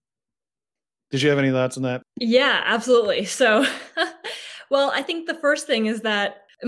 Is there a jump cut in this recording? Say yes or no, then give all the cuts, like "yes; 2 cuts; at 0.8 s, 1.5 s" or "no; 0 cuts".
no; 0 cuts